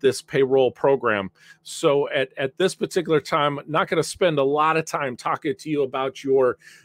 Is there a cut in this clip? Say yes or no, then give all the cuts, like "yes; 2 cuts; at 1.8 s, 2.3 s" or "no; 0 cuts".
no; 0 cuts